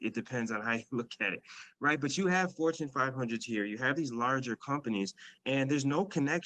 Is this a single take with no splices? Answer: no; 1 cut; at 5.4 s

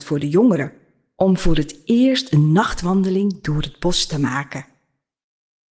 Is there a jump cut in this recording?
no; 0 cuts

